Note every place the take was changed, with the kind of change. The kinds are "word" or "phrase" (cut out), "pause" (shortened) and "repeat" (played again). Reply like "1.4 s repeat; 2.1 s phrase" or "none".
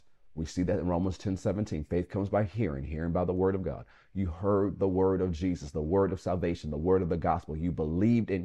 none